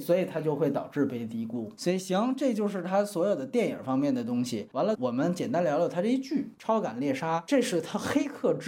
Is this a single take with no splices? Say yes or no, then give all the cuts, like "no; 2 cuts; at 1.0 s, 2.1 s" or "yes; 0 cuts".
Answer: no; 1 cut; at 4.9 s